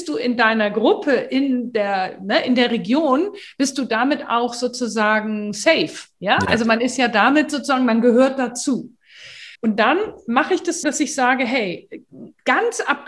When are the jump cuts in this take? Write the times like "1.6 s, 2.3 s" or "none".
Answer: 9.5 s, 10.8 s